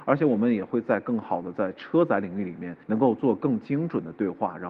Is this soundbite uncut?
no; 1 cut; at 2.8 s

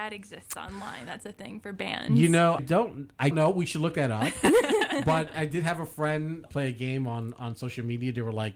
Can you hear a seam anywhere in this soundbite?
yes; 4 cuts; at 2.6 s, 3.3 s, 5.3 s, 6.5 s

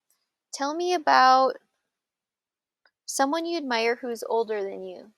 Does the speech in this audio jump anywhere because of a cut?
no; 0 cuts

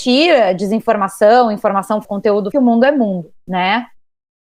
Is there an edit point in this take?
yes; 2 cuts; at 2.0 s, 2.5 s

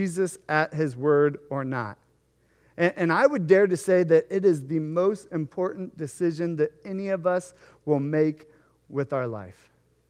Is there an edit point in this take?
no; 0 cuts

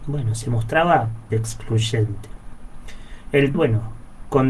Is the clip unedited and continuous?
no; 2 cuts; at 1.3 s, 3.5 s

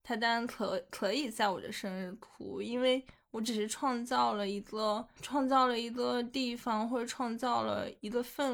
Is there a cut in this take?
no; 0 cuts

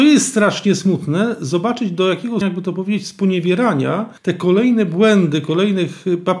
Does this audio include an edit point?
yes; 2 cuts; at 2.4 s, 4.2 s

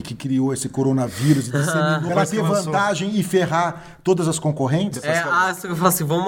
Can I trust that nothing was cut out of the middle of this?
no; 1 cut; at 2.1 s

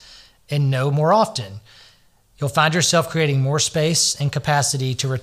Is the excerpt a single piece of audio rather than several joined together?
yes; 0 cuts

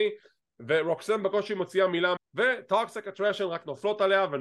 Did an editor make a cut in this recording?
yes; 1 cut; at 2.2 s

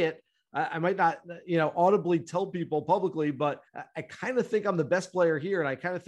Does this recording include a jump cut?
yes; 1 cut; at 3.7 s

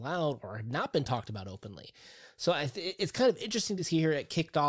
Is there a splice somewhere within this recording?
no; 0 cuts

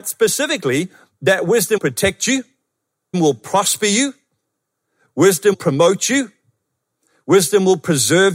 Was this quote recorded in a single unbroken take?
no; 3 cuts; at 1.8 s, 3.1 s, 5.5 s

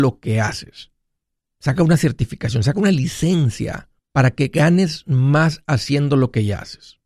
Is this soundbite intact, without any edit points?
no; 2 cuts; at 1.2 s, 4.0 s

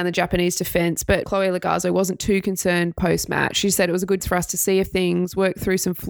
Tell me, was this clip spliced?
yes; 3 cuts; at 1.2 s, 4.2 s, 4.9 s

